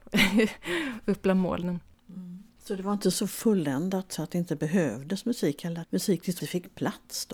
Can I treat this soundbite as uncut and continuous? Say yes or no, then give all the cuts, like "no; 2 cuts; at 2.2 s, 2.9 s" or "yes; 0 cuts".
no; 2 cuts; at 5.8 s, 6.4 s